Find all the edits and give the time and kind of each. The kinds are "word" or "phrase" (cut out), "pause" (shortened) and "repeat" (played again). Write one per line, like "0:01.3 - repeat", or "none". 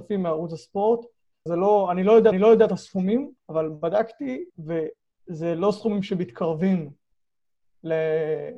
0:01.5 - word
0:02.3 - repeat
0:03.4 - pause
0:04.5 - pause